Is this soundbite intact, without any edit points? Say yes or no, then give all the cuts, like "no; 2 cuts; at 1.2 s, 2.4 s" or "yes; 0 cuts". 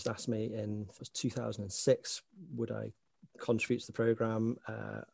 no; 2 cuts; at 1.0 s, 3.3 s